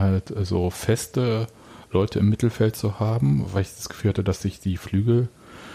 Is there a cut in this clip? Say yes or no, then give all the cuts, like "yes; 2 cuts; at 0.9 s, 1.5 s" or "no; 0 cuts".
no; 0 cuts